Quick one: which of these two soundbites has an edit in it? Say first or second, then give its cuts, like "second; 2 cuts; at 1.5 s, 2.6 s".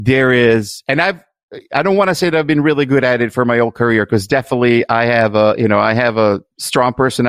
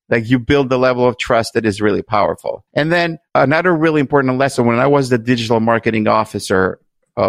second; 2 cuts; at 2.7 s, 3.3 s